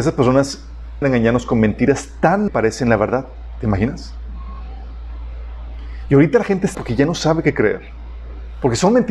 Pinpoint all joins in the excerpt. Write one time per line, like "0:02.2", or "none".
0:01.0
0:02.5
0:06.7